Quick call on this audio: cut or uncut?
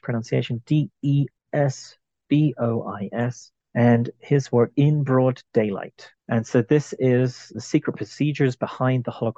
cut